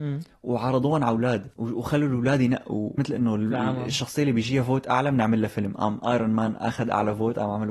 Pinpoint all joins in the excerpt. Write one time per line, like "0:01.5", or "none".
0:03.0